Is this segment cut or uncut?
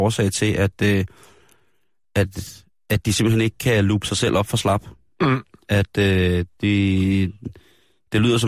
uncut